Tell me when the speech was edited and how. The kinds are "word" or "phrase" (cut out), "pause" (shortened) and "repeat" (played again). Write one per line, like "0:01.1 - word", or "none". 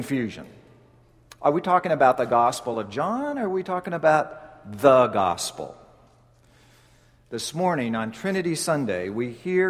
none